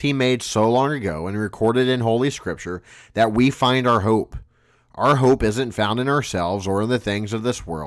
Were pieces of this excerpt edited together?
no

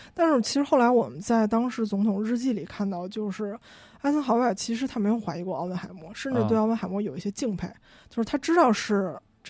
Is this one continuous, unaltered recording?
yes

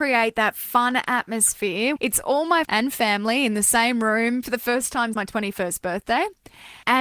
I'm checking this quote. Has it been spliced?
yes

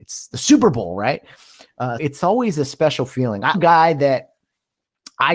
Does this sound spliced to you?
yes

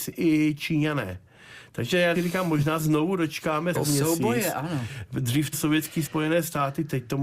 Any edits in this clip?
yes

